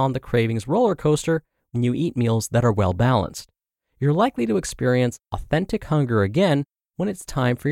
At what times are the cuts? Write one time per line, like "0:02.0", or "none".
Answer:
none